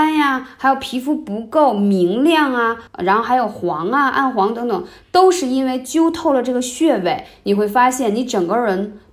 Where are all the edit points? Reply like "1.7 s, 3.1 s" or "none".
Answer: 2.9 s